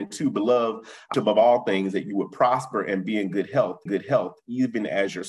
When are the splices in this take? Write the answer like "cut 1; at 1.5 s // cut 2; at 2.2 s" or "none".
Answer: cut 1; at 1.1 s // cut 2; at 3.9 s